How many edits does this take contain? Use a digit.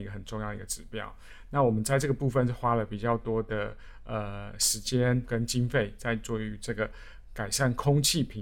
1